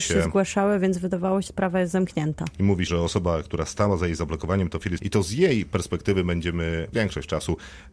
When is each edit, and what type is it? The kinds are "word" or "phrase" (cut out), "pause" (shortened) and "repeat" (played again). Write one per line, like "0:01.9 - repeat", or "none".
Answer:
0:01.5 - word
0:02.9 - word
0:05.0 - word
0:06.9 - word